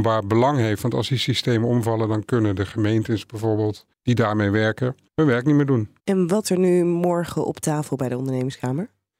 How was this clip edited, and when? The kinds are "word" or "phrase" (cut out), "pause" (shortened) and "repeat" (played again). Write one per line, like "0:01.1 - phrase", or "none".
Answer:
0:03.9 - pause
0:05.1 - pause
0:06.0 - pause
0:06.4 - word